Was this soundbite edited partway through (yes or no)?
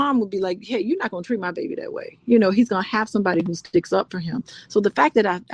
no